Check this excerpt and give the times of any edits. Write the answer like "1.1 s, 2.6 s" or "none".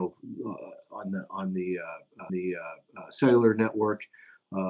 2.3 s